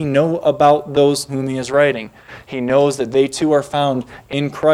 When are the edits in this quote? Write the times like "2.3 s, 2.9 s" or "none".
1.3 s